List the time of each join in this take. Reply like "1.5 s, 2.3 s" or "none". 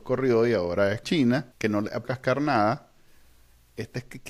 1.0 s, 1.5 s, 2.0 s